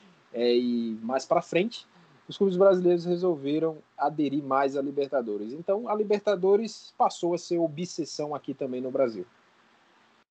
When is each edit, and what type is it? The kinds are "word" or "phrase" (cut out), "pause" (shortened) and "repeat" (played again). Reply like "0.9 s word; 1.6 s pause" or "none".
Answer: none